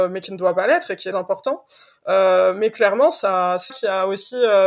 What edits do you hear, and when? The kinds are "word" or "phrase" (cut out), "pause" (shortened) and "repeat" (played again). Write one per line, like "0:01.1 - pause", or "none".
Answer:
0:01.1 - word
0:03.7 - word